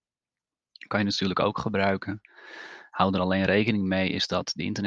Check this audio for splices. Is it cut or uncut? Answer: uncut